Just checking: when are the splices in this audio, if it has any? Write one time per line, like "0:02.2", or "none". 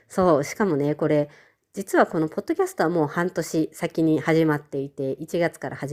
none